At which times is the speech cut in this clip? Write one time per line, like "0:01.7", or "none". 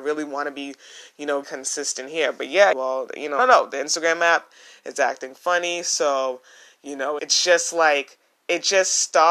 0:01.4
0:02.7
0:03.4
0:07.2